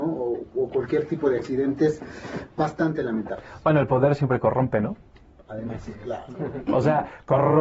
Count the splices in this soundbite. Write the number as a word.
zero